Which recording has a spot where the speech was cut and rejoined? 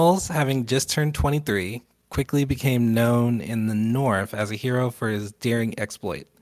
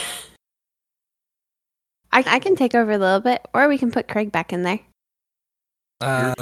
second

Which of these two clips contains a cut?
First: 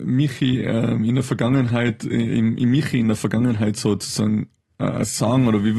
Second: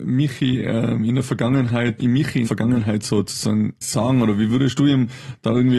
second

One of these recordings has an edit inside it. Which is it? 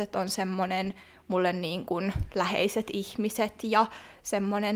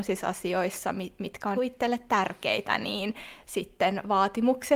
second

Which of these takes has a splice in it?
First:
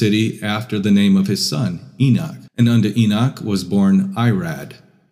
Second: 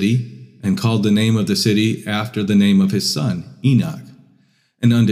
first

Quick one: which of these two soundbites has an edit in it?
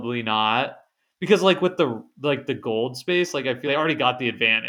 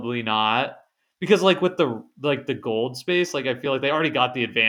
first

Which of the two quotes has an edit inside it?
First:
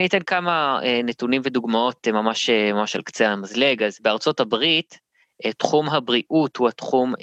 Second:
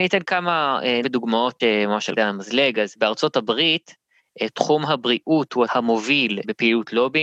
second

